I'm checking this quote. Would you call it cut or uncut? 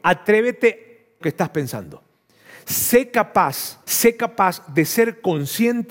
cut